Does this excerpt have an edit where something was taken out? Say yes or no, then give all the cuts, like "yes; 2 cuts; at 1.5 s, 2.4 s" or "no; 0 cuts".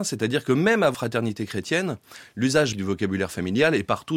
yes; 2 cuts; at 0.9 s, 2.7 s